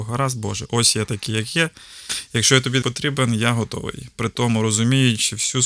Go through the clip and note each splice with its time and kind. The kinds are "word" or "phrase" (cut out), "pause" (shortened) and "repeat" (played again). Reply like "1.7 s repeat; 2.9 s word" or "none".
2.8 s word